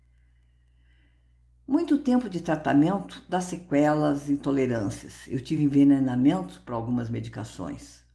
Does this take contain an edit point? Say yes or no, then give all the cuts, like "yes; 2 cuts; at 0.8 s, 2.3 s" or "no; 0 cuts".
no; 0 cuts